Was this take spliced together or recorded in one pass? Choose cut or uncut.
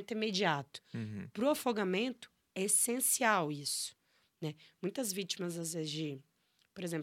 uncut